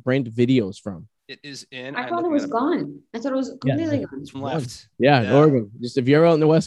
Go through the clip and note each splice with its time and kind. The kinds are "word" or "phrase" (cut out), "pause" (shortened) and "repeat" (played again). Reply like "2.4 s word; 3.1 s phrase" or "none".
1.2 s pause; 4.3 s word

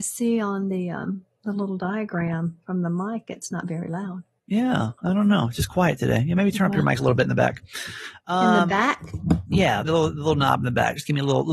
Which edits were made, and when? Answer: 2.6 s pause; 5.0 s pause; 9.8 s phrase

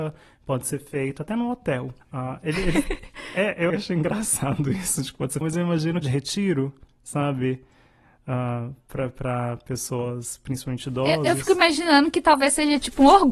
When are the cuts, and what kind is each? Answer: 2.0 s pause; 3.7 s word; 5.4 s phrase; 6.0 s phrase

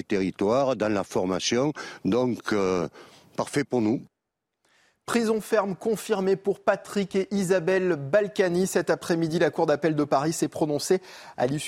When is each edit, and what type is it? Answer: none

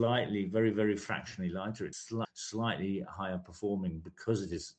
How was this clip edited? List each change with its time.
1.9 s word; 2.2 s word

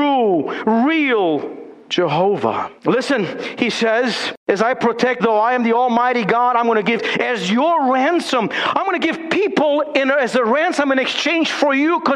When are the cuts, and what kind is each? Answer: 1.9 s word; 2.8 s pause; 4.4 s pause; 5.2 s word; 7.0 s word

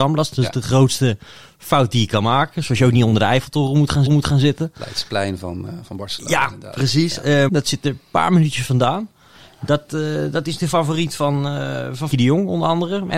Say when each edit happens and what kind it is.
4.1 s repeat; 7.5 s phrase; 12.1 s word

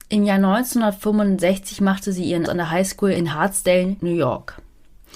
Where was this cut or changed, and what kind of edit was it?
2.5 s word

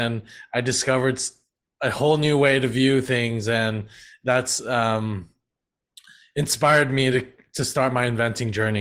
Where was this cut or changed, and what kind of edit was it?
none

